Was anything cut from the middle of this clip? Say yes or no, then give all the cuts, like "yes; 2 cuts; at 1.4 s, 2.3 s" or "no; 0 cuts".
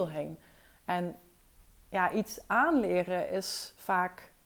no; 0 cuts